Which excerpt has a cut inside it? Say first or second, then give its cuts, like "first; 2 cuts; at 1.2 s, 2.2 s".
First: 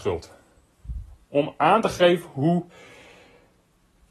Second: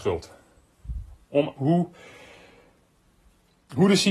second; 1 cut; at 1.6 s